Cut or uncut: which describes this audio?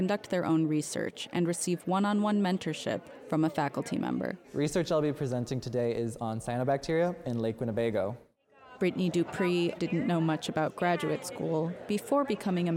cut